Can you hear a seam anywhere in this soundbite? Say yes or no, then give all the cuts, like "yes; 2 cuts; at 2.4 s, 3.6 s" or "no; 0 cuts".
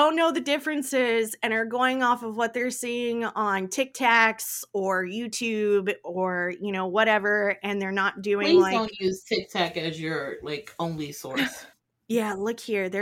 yes; 1 cut; at 11.7 s